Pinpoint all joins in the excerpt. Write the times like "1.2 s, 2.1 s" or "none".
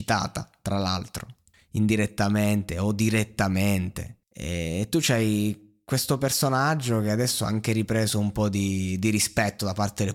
1.5 s, 4.2 s